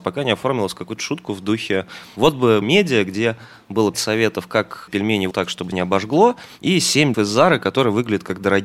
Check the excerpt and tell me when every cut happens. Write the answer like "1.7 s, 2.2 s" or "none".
2.6 s, 3.9 s, 4.9 s, 5.3 s, 5.7 s, 7.1 s